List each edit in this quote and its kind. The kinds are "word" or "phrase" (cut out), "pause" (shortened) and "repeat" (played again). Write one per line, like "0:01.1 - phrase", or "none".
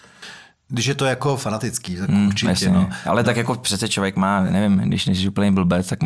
none